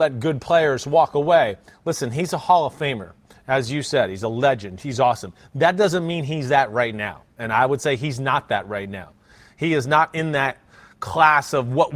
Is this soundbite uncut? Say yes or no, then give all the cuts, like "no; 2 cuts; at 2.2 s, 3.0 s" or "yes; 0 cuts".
yes; 0 cuts